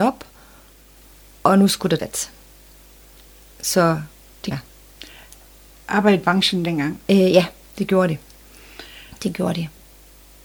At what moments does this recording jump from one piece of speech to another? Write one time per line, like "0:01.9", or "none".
0:02.0
0:04.5
0:06.2